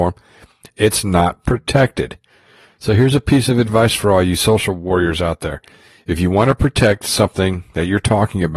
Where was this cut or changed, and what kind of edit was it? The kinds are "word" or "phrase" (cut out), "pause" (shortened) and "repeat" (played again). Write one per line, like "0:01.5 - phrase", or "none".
none